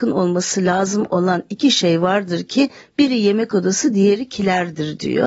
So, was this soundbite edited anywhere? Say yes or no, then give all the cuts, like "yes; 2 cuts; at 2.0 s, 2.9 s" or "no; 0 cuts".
no; 0 cuts